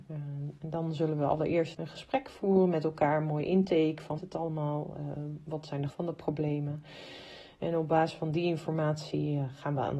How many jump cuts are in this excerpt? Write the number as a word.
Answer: three